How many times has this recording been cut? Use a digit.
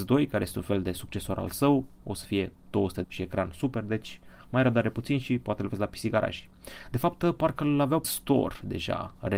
2